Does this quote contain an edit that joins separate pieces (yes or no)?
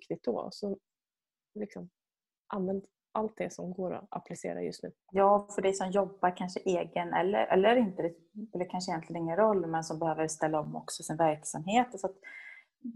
yes